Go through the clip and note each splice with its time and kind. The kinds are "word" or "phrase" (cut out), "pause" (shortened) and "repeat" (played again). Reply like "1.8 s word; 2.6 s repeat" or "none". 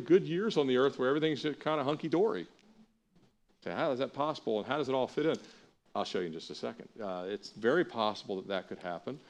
none